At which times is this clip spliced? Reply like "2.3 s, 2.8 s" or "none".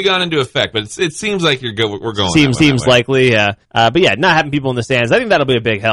2.6 s, 3.6 s